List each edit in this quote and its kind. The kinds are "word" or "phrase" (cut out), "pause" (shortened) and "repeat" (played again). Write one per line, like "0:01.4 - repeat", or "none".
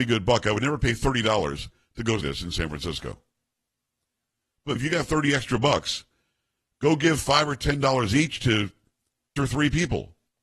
0:02.2 - word
0:04.8 - word
0:09.4 - word